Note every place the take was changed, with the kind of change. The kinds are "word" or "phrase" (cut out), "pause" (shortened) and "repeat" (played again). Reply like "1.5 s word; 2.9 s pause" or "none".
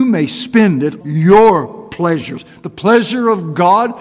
1.0 s word

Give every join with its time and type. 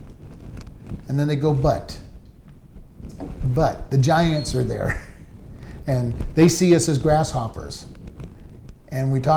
none

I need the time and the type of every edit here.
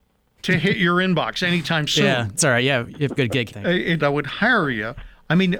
2.4 s word; 3.2 s word; 3.5 s phrase; 4.0 s phrase

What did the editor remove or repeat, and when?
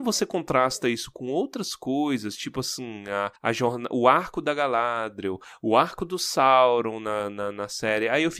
3.4 s pause

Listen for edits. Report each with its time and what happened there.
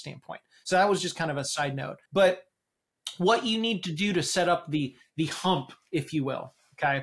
2.1 s pause

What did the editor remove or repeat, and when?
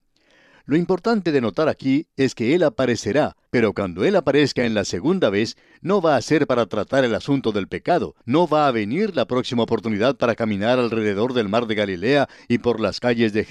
8.2 s pause

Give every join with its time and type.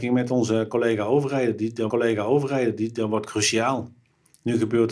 1.9 s repeat

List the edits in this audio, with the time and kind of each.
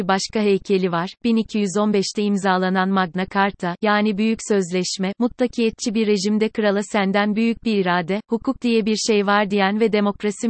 none

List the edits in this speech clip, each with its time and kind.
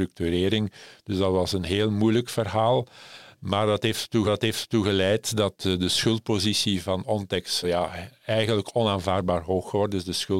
4.2 s repeat; 7.6 s word

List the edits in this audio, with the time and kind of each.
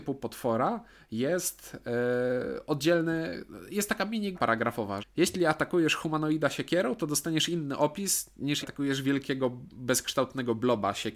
4.3 s word; 5.0 s word; 8.6 s word

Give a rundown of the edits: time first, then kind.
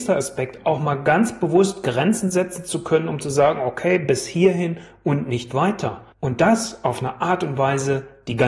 6.1 s pause

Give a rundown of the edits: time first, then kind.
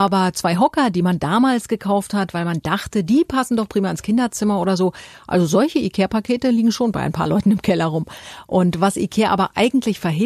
none

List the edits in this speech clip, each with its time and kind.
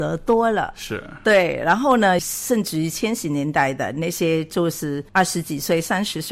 2.2 s phrase; 5.1 s pause

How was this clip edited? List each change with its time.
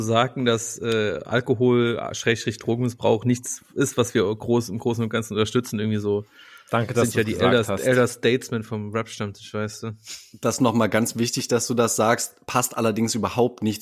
none

